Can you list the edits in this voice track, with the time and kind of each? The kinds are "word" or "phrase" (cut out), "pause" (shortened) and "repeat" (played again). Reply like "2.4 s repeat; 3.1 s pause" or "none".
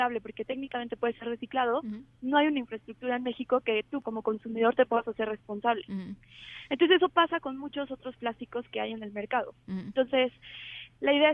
4.0 s word